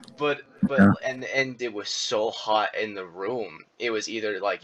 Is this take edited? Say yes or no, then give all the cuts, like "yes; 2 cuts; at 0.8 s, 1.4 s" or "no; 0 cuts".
yes; 1 cut; at 1.6 s